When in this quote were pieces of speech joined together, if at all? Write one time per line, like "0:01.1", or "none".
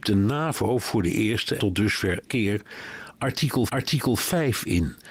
0:01.6
0:02.2
0:03.7